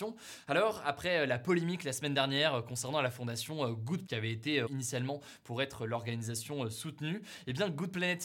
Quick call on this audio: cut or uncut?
cut